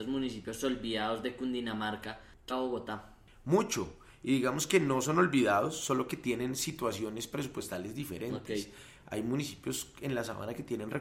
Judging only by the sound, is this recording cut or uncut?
cut